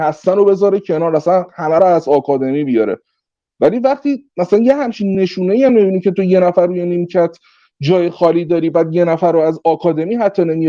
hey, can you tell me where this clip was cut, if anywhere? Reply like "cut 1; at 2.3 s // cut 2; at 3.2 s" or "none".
none